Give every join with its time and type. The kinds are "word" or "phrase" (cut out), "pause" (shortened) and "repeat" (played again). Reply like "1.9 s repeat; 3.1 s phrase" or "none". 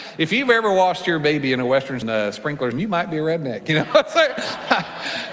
2.0 s word; 2.7 s word